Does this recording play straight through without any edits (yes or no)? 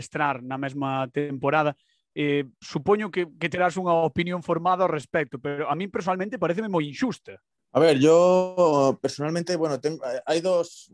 yes